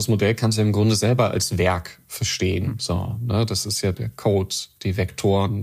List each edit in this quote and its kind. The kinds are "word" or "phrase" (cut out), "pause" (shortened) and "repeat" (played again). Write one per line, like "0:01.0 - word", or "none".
0:03.9 - word